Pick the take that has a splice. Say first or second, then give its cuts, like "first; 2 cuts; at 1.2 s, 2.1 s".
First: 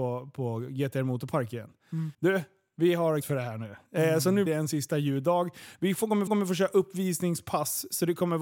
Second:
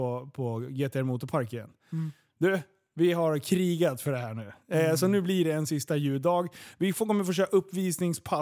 first; 4 cuts; at 2.1 s, 3.2 s, 4.5 s, 6.3 s